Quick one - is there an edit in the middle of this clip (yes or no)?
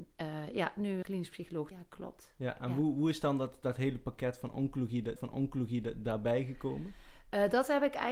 yes